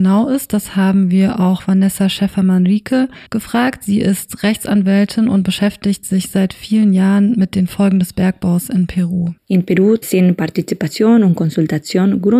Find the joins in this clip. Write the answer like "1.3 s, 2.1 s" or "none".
3.3 s, 9.4 s